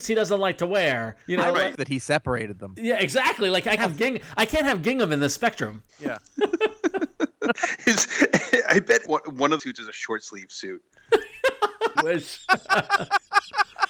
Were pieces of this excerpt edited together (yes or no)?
yes